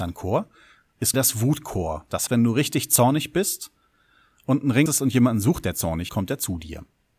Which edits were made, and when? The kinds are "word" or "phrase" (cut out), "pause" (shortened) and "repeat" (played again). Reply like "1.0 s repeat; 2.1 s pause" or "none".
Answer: 1.1 s word; 2.3 s word; 4.9 s word; 6.1 s word